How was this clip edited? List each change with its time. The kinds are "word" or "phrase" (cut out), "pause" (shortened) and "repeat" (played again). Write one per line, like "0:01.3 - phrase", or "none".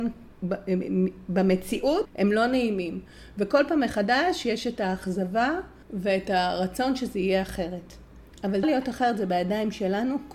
0:08.6 - word